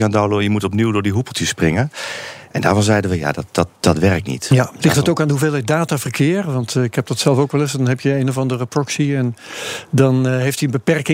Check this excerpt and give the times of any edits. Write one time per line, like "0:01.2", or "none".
0:03.8